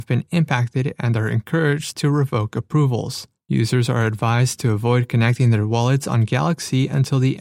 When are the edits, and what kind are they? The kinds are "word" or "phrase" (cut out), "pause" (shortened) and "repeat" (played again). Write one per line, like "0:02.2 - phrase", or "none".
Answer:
none